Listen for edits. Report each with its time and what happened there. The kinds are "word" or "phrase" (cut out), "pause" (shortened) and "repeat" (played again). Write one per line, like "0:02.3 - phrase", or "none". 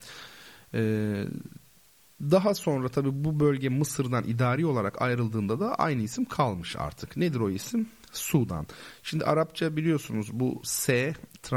none